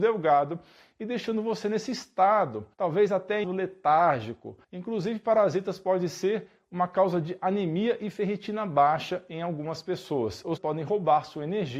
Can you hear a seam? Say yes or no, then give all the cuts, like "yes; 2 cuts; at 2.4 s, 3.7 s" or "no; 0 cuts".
yes; 4 cuts; at 2.7 s, 3.4 s, 4.6 s, 10.6 s